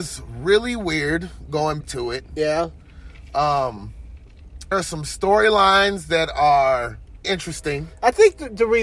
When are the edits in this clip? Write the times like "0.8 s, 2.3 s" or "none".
1.8 s, 4.7 s, 7.2 s

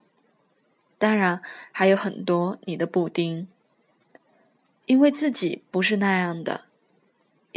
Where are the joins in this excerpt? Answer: none

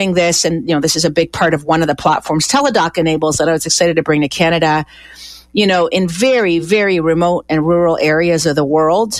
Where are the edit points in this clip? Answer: none

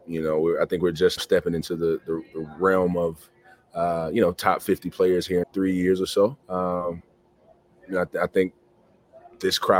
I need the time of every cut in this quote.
1.2 s, 5.4 s, 6.4 s

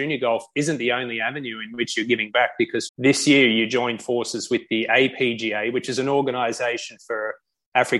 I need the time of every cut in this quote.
2.9 s

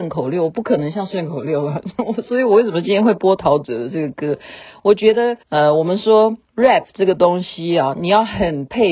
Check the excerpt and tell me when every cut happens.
5.4 s, 6.4 s

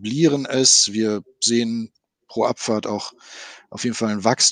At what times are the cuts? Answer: none

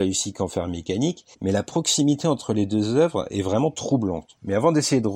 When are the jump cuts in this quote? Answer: 1.3 s

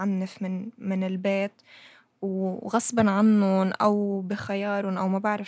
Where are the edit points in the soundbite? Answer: none

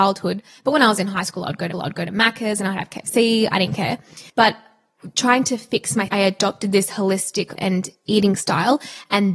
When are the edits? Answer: 1.7 s, 4.3 s, 6.1 s, 7.6 s

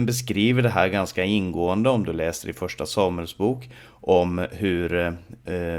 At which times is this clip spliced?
none

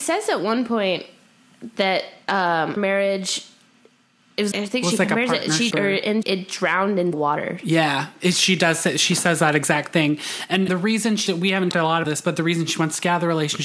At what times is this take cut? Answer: 2.8 s, 4.5 s, 5.7 s, 6.2 s, 7.1 s, 10.7 s, 11.3 s, 11.7 s, 12.0 s

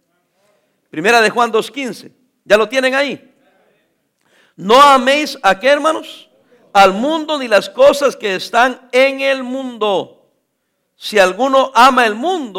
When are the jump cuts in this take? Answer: none

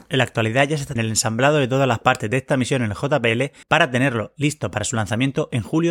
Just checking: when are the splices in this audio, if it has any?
1.0 s, 3.6 s

